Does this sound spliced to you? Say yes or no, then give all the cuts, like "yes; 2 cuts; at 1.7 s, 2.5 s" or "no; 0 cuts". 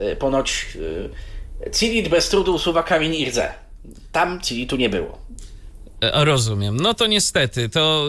no; 0 cuts